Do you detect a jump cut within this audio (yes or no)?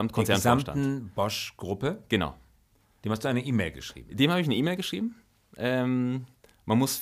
no